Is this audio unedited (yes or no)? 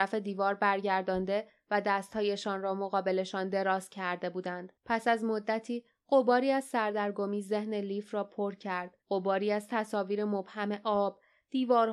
no